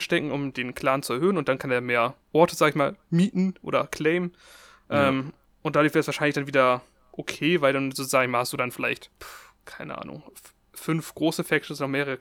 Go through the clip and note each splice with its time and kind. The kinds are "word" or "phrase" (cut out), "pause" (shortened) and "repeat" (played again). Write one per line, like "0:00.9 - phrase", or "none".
0:02.2 - pause
0:05.4 - pause
0:09.1 - pause